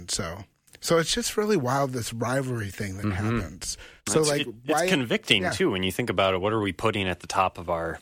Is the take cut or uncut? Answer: cut